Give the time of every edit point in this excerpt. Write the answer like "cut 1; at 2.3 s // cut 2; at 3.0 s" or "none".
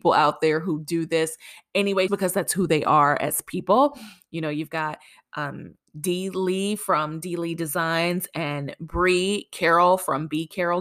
cut 1; at 2.1 s